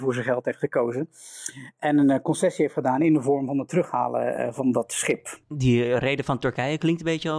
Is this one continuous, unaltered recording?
no; 1 cut; at 5.4 s

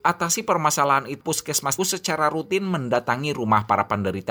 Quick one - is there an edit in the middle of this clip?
yes; 2 cuts; at 1.2 s, 1.8 s

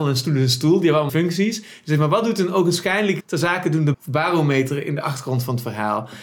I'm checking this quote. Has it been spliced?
yes; 3 cuts; at 1.1 s, 3.2 s, 3.9 s

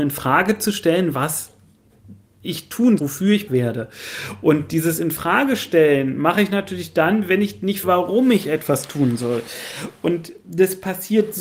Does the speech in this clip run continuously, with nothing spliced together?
no; 3 cuts; at 3.0 s, 3.5 s, 7.8 s

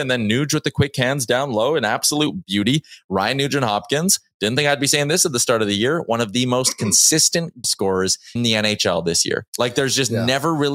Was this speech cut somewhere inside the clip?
yes; 3 cuts; at 7.6 s, 8.4 s, 9.5 s

